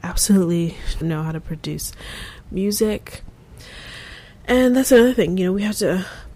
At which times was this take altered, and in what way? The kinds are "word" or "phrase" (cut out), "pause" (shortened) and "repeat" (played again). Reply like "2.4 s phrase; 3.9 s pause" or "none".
1.0 s word